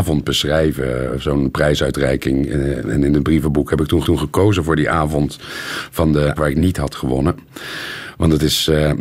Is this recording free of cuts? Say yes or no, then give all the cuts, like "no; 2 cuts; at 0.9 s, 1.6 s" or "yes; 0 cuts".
no; 2 cuts; at 4.0 s, 6.4 s